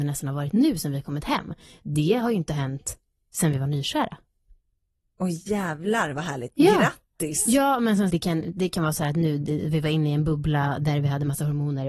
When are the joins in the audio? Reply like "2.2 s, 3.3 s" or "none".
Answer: 8.1 s